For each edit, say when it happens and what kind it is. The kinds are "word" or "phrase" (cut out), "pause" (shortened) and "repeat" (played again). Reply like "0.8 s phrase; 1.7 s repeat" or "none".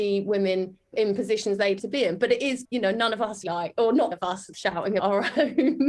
0.9 s word; 1.8 s word; 2.6 s word; 3.4 s word; 4.1 s word; 4.5 s word; 5.0 s word